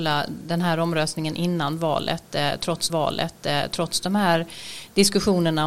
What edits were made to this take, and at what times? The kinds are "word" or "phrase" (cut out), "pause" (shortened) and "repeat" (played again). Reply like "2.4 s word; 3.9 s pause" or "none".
2.9 s repeat